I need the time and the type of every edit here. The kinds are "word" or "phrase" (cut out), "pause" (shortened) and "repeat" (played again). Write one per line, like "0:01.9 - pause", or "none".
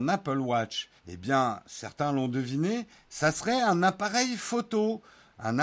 0:01.0 - pause